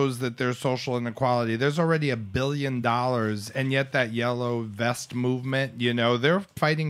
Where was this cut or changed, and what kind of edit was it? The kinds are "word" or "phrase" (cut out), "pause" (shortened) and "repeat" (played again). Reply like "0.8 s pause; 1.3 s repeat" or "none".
none